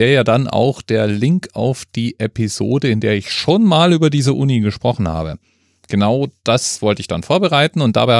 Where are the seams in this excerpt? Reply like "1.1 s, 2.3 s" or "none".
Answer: none